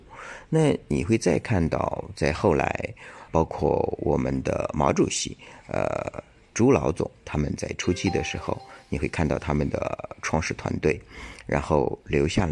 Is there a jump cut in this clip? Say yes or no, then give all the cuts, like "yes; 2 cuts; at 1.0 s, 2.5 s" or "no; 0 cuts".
yes; 1 cut; at 3.3 s